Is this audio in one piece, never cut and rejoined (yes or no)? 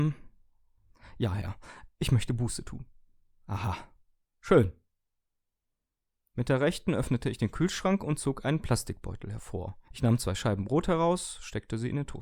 yes